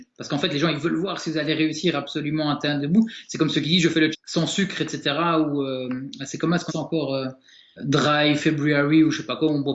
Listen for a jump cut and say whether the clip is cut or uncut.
cut